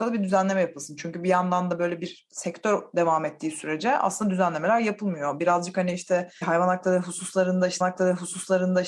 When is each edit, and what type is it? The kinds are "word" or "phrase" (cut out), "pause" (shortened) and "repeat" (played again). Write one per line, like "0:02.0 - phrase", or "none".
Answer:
0:06.4 - word
0:07.8 - repeat